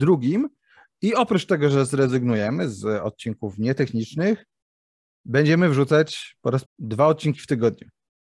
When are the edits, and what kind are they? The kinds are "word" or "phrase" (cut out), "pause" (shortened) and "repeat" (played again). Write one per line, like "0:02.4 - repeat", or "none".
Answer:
0:06.7 - word